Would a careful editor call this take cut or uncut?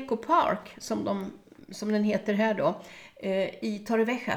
uncut